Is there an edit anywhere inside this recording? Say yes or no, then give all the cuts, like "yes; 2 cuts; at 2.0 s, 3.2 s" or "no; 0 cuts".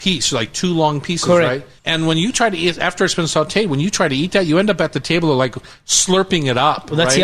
yes; 1 cut; at 1.8 s